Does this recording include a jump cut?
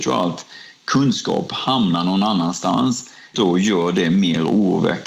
yes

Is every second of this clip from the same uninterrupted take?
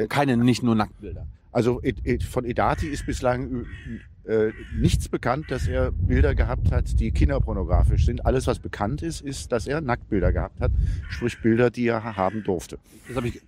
yes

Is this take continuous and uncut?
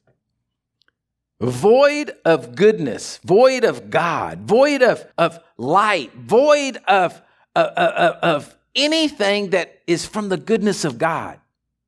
no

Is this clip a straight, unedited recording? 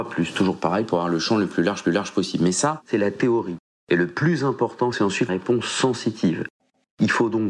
no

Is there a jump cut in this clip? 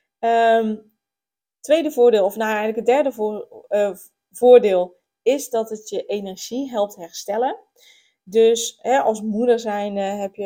no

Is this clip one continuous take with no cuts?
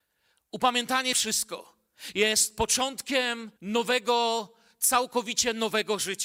no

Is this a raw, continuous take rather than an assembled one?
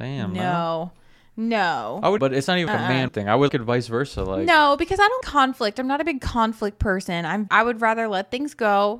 no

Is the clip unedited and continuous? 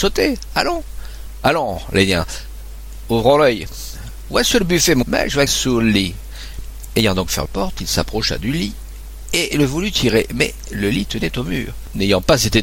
no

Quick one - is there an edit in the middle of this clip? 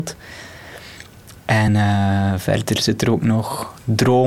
no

